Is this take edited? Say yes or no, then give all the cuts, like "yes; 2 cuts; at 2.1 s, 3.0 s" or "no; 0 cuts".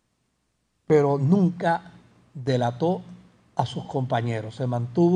no; 0 cuts